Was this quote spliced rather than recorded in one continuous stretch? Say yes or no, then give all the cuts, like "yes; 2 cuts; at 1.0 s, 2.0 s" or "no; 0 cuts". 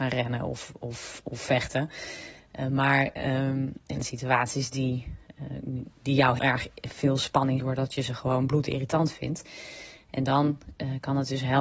yes; 3 cuts; at 4.0 s, 6.4 s, 7.6 s